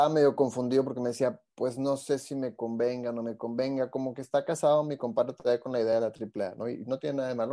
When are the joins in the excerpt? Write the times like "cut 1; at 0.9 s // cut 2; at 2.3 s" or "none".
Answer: cut 1; at 1.5 s